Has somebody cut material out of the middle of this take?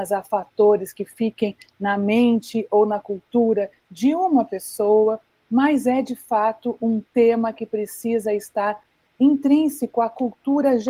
no; 0 cuts

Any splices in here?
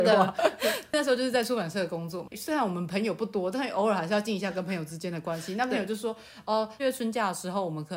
yes; 1 cut; at 6.8 s

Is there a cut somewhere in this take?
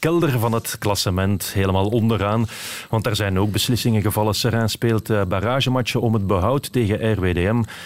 no; 0 cuts

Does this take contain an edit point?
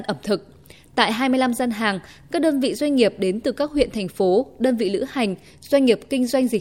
no; 0 cuts

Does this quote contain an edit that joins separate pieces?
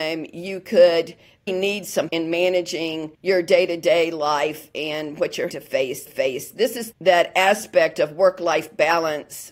yes; 6 cuts; at 1.5 s, 2.1 s, 3.1 s, 5.5 s, 6.1 s, 6.9 s

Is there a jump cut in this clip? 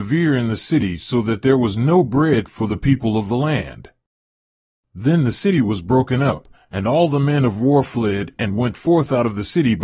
no; 0 cuts

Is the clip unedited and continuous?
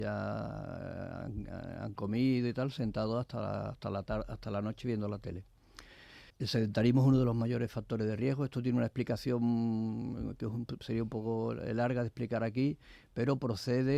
no; 1 cut; at 6.3 s

